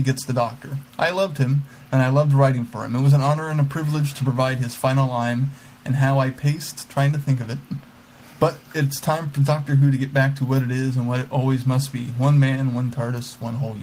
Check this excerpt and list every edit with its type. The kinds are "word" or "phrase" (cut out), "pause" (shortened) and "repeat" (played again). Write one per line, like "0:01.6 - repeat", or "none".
none